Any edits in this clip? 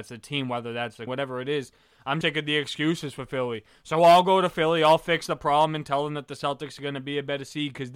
yes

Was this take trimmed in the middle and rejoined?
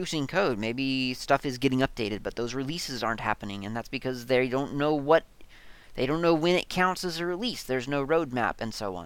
no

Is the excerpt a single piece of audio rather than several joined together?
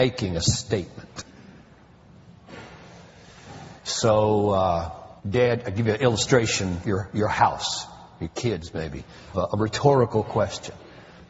no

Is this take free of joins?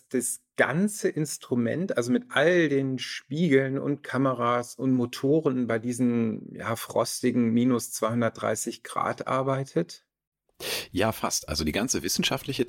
yes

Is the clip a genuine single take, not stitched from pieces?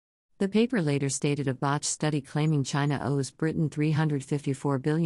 yes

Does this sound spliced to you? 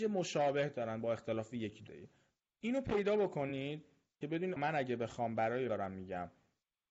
yes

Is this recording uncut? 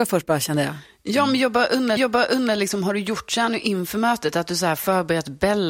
no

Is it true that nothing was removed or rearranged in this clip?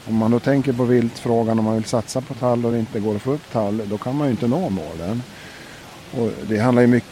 yes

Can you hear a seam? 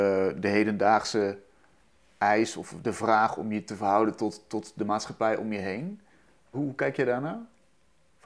yes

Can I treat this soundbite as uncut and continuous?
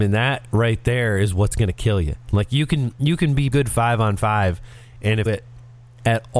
no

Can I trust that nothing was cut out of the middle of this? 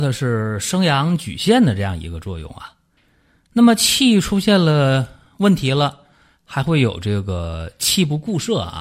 yes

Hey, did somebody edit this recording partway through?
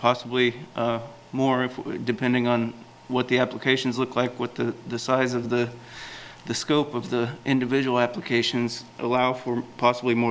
no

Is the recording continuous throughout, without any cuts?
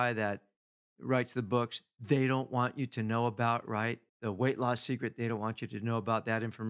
no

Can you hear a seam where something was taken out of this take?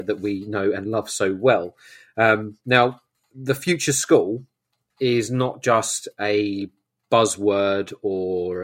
no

